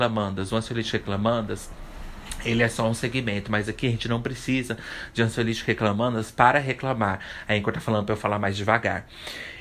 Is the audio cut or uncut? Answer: uncut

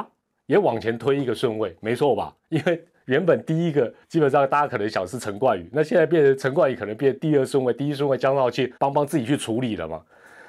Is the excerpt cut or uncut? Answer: cut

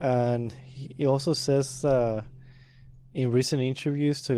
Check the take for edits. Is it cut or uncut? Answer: uncut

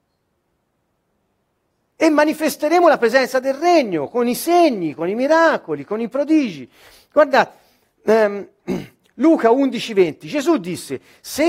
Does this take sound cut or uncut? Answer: uncut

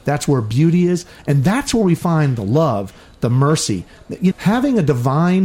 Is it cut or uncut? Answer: cut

